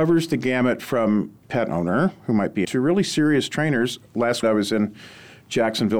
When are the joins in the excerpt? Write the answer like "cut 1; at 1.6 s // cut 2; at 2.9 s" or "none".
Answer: cut 1; at 1.4 s // cut 2; at 2.6 s // cut 3; at 4.4 s